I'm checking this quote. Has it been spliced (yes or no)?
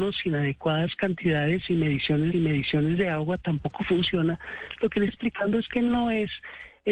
yes